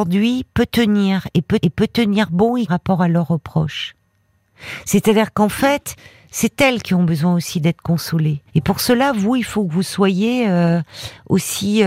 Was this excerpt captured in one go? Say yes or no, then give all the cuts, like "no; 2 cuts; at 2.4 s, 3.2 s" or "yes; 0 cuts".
no; 3 cuts; at 1.6 s, 2.7 s, 8.5 s